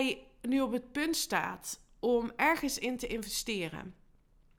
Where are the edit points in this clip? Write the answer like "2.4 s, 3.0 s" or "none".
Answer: none